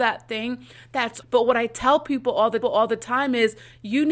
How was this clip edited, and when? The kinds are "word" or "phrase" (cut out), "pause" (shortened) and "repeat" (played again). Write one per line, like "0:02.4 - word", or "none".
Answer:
0:01.2 - word
0:02.6 - repeat